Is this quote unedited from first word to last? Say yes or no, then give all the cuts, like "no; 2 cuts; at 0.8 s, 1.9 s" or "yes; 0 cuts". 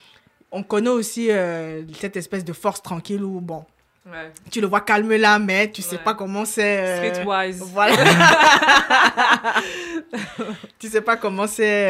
yes; 0 cuts